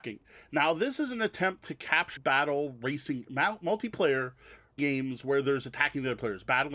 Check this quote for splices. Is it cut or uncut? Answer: cut